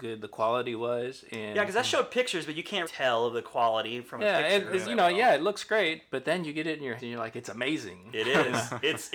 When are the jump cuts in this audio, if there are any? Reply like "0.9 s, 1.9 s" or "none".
2.8 s, 4.8 s, 7.0 s